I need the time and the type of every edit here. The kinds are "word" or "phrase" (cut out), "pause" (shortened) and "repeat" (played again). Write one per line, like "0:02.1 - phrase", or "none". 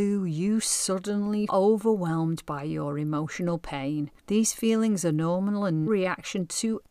0:01.5 - word
0:04.2 - pause
0:05.9 - word